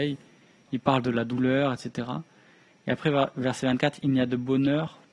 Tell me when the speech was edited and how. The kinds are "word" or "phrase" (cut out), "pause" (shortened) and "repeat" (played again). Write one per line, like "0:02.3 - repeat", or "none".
none